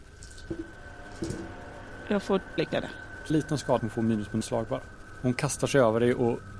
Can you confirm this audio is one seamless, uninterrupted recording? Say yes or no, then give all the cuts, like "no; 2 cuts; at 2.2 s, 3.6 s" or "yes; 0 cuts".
no; 4 cuts; at 2.6 s, 3.3 s, 3.8 s, 4.4 s